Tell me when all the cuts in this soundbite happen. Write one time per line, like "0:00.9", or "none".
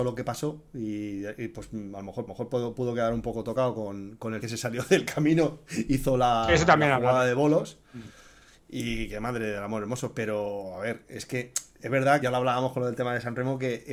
0:02.3
0:04.4
0:05.9
0:12.2